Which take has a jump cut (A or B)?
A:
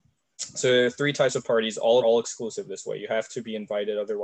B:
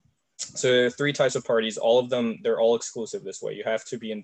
A